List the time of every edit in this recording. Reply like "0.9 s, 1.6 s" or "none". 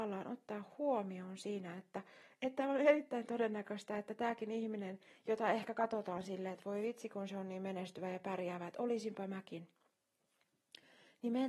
none